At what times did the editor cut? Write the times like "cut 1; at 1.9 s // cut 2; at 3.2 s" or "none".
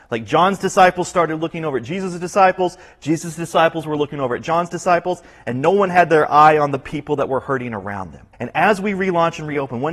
cut 1; at 8.3 s